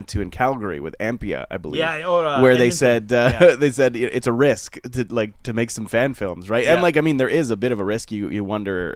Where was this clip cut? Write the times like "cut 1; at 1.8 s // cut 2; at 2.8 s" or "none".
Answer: none

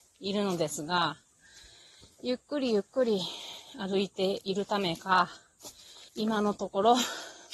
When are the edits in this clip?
cut 1; at 6.1 s

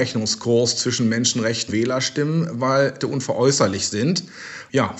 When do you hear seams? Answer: cut 1; at 1.7 s // cut 2; at 3.0 s

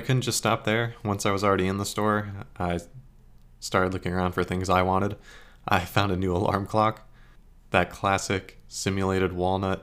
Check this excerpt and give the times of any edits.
none

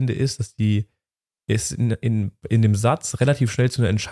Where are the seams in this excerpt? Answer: none

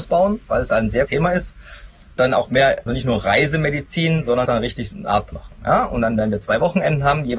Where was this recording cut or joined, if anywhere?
cut 1; at 1.1 s // cut 2; at 2.2 s // cut 3; at 2.9 s // cut 4; at 4.4 s // cut 5; at 4.9 s // cut 6; at 5.3 s

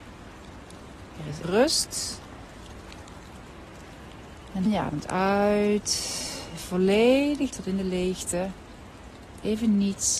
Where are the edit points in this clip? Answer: cut 1; at 1.4 s // cut 2; at 4.6 s // cut 3; at 7.5 s

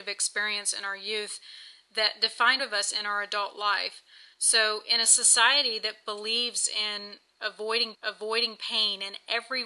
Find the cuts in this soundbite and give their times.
cut 1; at 2.6 s // cut 2; at 4.3 s // cut 3; at 7.9 s

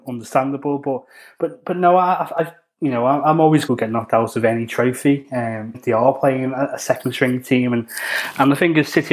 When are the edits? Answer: cut 1; at 3.7 s // cut 2; at 5.7 s

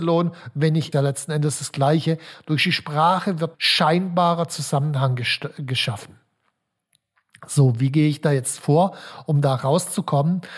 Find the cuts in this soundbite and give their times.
cut 1; at 0.9 s // cut 2; at 3.5 s

